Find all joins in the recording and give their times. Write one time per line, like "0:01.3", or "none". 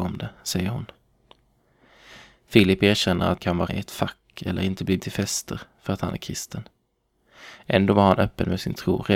0:03.4
0:03.7
0:05.0